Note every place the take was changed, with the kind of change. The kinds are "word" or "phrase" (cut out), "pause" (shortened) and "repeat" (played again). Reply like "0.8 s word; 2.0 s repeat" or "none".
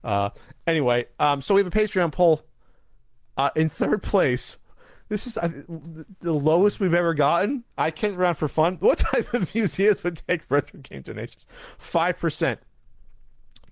none